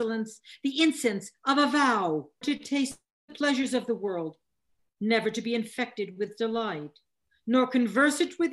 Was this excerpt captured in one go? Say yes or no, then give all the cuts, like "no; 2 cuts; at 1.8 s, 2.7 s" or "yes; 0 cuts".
no; 1 cut; at 2.4 s